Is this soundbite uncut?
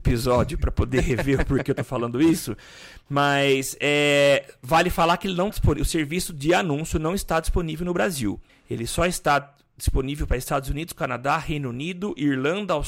no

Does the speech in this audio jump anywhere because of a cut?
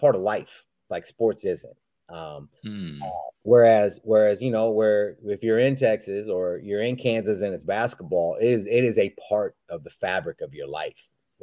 yes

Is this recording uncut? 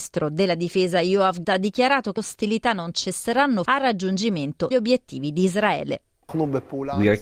no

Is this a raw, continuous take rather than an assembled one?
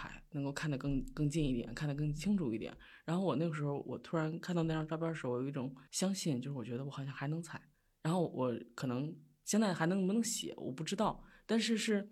no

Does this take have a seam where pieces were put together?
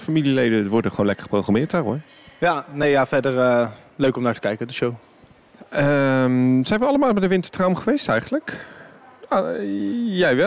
no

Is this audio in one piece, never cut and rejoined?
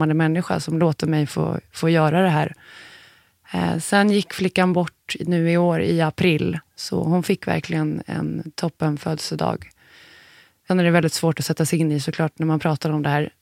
yes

